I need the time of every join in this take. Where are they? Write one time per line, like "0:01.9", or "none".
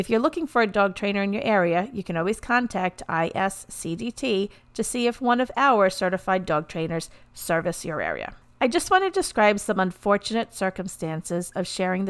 0:08.4